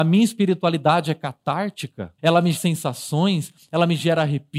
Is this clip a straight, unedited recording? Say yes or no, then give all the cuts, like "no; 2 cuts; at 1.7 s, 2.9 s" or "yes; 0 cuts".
no; 2 cuts; at 2.2 s, 2.5 s